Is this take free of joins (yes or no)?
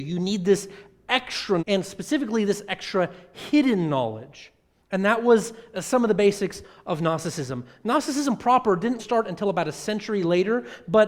no